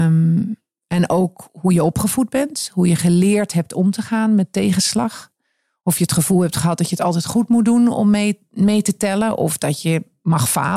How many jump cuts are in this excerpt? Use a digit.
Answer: 0